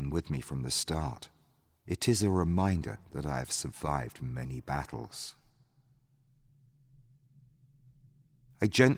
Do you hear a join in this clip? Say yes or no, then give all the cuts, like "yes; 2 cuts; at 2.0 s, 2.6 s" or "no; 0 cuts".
no; 0 cuts